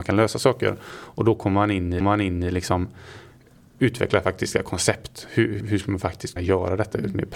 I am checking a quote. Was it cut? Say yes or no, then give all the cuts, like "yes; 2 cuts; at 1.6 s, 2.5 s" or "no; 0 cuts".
yes; 3 cuts; at 2.0 s, 5.6 s, 6.4 s